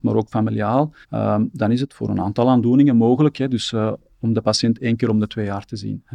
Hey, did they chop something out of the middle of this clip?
yes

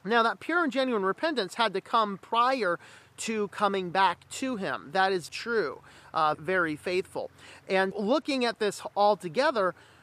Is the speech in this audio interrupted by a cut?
yes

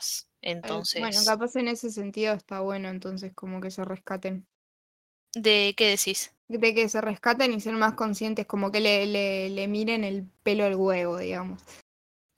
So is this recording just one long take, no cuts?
no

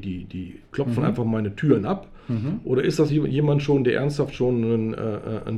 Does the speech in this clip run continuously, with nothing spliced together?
yes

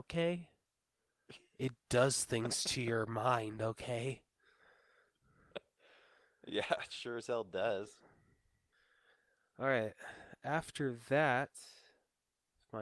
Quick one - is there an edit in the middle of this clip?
no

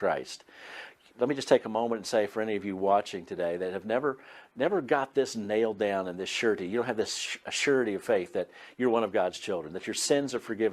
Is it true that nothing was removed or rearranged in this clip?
yes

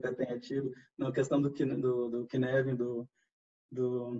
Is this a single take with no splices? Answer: yes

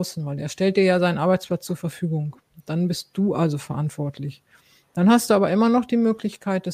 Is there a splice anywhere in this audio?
no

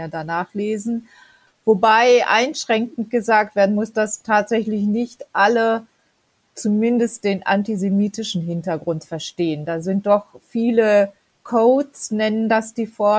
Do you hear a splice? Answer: no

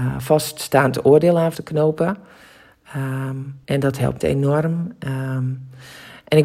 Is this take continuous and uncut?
no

